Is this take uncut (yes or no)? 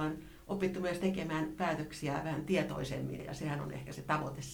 yes